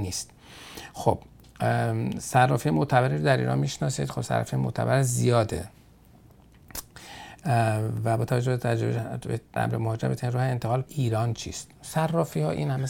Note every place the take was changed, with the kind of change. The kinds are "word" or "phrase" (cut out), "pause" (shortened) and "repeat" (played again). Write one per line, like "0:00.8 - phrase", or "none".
0:09.6 - word
0:10.9 - phrase